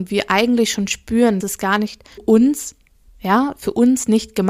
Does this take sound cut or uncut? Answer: cut